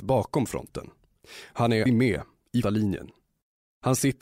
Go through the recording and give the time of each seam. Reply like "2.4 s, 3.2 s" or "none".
1.9 s, 2.6 s